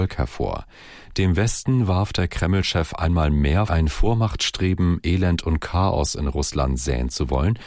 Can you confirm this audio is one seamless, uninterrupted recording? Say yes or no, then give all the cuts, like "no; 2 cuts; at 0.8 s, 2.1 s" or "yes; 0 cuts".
no; 1 cut; at 3.7 s